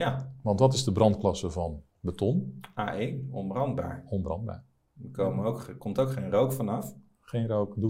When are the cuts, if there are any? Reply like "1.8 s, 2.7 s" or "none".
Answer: 1.9 s